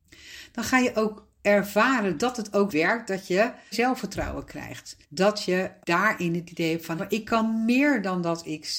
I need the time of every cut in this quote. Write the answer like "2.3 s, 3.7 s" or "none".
2.7 s, 3.7 s, 5.0 s, 5.8 s, 7.0 s